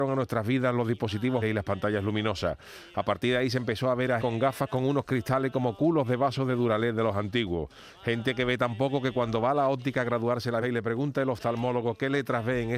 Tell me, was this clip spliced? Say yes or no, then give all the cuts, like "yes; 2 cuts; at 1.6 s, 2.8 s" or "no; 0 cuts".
yes; 3 cuts; at 1.4 s, 4.2 s, 10.6 s